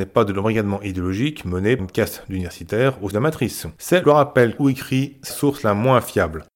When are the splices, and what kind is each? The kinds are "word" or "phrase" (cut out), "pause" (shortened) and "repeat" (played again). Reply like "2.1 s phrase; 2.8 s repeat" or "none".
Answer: 1.8 s word; 3.1 s word; 4.0 s phrase; 4.6 s phrase; 5.3 s word

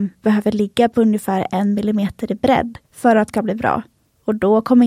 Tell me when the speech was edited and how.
2.8 s pause; 3.3 s word

